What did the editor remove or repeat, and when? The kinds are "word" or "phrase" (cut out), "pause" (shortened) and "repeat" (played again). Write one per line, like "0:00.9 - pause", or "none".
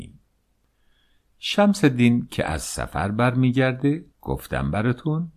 0:04.1 - pause